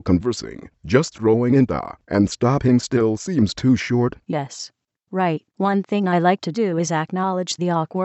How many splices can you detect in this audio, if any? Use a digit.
2